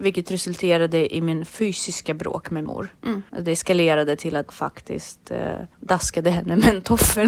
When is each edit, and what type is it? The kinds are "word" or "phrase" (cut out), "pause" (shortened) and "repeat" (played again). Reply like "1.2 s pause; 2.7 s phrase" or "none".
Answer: 1.5 s phrase; 2.7 s word; 3.3 s pause; 4.5 s word; 5.7 s pause